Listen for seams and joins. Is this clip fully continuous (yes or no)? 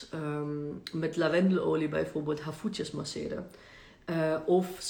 yes